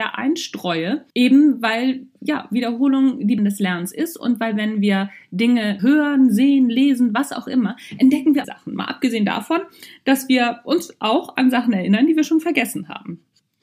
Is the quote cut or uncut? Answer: cut